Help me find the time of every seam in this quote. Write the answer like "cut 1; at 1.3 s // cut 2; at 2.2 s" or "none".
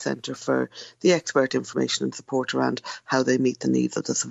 none